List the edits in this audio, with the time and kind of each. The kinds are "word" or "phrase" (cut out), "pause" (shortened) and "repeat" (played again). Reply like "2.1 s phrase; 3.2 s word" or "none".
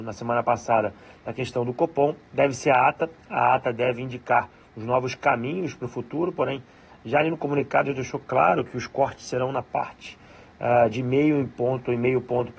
none